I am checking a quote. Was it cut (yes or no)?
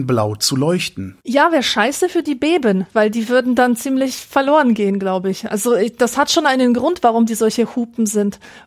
yes